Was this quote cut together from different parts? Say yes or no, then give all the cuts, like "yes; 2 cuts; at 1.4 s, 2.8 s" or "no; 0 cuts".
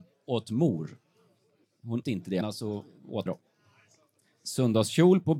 yes; 3 cuts; at 2.0 s, 2.4 s, 3.3 s